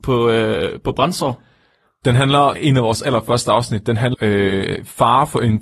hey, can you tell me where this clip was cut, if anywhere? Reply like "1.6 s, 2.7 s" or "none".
2.5 s, 4.1 s

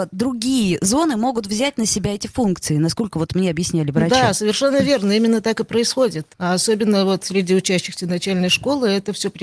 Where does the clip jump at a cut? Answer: 6.3 s

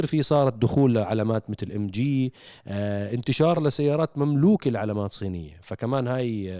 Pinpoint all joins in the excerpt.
none

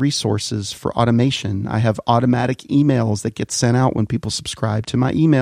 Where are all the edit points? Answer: none

